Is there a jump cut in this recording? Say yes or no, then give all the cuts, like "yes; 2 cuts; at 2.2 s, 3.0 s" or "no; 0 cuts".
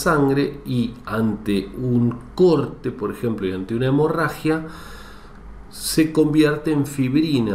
no; 0 cuts